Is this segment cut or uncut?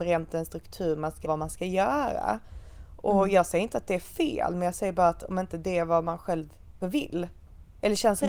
cut